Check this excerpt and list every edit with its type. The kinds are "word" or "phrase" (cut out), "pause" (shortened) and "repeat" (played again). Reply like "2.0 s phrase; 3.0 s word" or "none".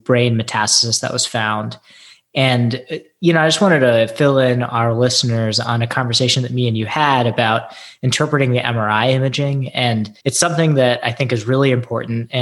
10.2 s pause